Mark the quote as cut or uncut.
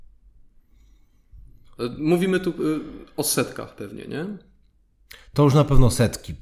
uncut